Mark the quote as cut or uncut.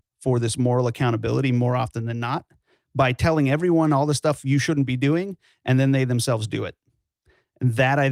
uncut